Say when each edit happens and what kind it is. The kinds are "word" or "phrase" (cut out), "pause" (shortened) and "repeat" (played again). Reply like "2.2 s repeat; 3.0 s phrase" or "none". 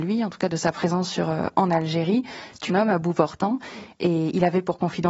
2.7 s word